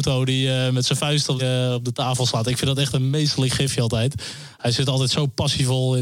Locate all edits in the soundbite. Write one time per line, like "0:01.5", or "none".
0:01.4